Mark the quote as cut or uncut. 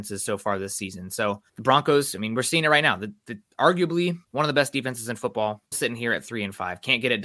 cut